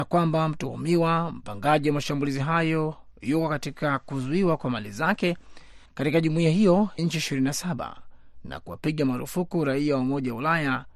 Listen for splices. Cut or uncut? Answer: cut